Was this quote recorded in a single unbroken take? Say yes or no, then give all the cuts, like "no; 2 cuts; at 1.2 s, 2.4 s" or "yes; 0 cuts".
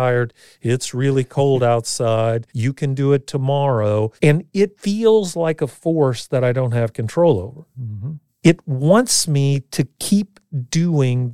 no; 2 cuts; at 2.5 s, 4.2 s